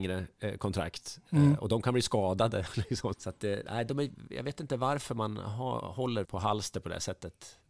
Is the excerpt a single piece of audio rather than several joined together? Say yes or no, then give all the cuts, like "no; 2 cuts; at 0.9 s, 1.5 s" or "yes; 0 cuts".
no; 2 cuts; at 3.1 s, 6.2 s